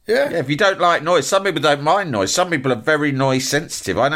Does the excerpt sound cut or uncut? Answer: uncut